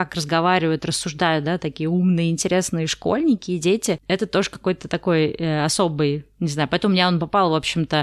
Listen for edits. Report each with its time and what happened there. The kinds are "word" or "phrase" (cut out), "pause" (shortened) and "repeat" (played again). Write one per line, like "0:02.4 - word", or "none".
none